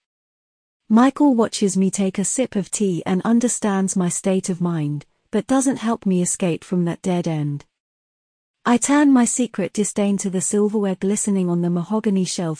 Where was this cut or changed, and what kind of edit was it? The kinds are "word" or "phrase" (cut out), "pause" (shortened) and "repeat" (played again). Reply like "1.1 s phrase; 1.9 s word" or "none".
none